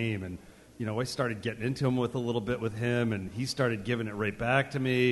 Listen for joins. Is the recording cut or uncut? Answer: uncut